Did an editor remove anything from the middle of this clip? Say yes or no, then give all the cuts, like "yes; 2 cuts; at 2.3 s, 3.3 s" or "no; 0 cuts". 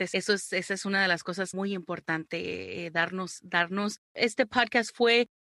yes; 1 cut; at 1.5 s